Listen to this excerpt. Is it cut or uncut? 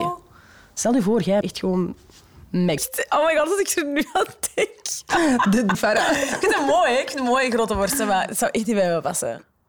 cut